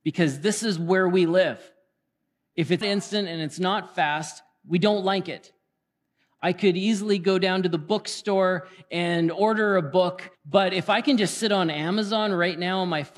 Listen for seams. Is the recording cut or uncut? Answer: cut